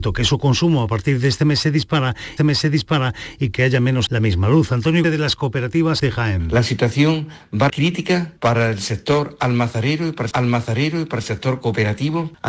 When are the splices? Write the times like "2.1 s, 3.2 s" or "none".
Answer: 2.4 s, 3.6 s, 4.1 s, 5.0 s, 6.0 s, 7.7 s, 10.3 s